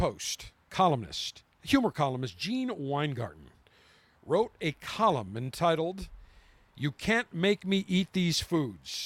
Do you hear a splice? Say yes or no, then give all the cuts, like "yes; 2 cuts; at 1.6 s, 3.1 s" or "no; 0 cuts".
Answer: no; 0 cuts